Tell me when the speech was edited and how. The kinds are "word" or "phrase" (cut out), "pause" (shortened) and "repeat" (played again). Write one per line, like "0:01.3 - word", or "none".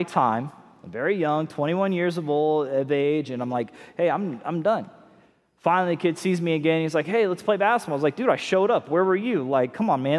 none